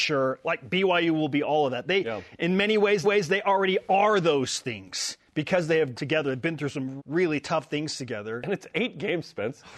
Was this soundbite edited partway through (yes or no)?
yes